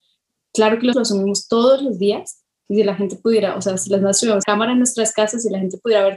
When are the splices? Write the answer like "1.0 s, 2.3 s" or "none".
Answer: 0.9 s, 4.4 s